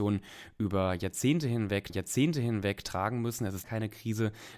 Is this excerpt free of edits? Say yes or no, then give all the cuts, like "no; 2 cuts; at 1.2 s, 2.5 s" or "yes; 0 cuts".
no; 2 cuts; at 1.9 s, 3.6 s